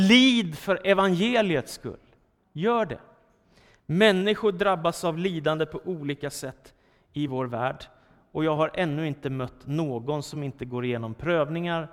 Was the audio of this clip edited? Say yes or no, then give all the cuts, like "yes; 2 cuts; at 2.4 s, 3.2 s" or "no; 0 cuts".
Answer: no; 0 cuts